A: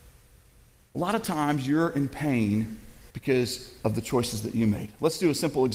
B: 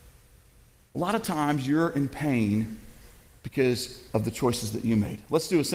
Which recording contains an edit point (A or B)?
A